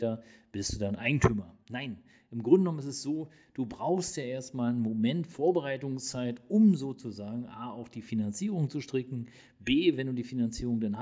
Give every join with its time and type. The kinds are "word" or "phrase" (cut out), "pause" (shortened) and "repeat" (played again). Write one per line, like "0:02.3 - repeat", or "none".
none